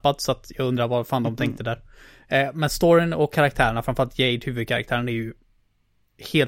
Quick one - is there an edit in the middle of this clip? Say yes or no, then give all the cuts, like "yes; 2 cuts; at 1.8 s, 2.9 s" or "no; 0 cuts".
no; 0 cuts